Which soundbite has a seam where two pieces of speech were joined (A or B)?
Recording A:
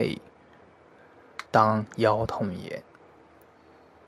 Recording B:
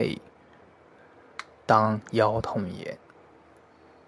A